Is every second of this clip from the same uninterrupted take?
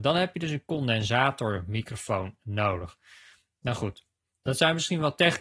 yes; 0 cuts

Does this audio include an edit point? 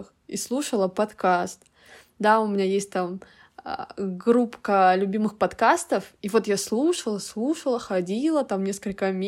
no; 0 cuts

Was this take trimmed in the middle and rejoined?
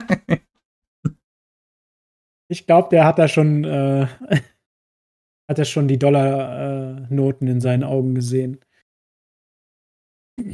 no; 0 cuts

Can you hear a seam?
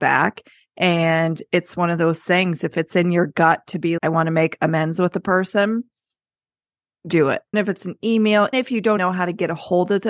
yes; 4 cuts; at 4.0 s, 7.5 s, 8.5 s, 9.0 s

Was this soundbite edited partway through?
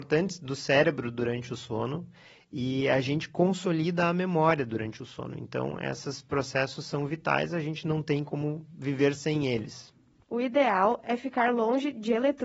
no; 0 cuts

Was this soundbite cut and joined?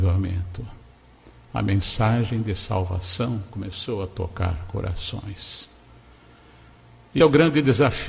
yes; 1 cut; at 7.2 s

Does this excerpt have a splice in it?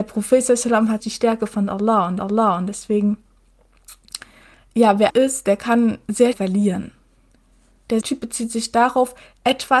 yes; 5 cuts; at 1.0 s, 2.2 s, 5.1 s, 6.3 s, 8.0 s

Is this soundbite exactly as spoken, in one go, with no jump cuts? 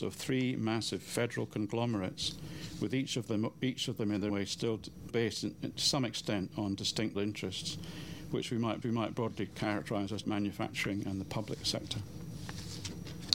no; 5 cuts; at 4.3 s, 5.1 s, 7.1 s, 8.8 s, 10.2 s

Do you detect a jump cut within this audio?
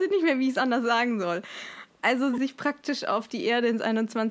yes; 1 cut; at 2.4 s

